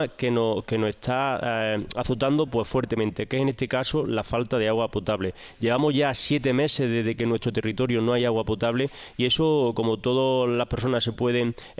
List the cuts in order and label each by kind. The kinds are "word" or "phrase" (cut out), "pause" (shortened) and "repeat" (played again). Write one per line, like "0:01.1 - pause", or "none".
none